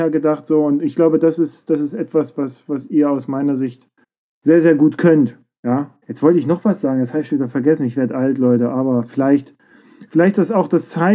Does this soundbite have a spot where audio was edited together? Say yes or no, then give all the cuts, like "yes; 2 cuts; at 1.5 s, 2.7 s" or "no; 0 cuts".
yes; 2 cuts; at 4.0 s, 6.0 s